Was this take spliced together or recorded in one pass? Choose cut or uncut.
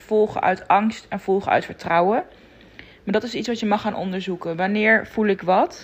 uncut